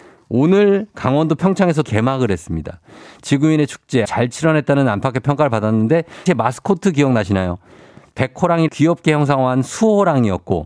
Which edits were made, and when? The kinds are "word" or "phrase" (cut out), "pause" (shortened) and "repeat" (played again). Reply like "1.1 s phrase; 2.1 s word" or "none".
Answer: 1.8 s word; 4.0 s word; 6.3 s word; 8.7 s word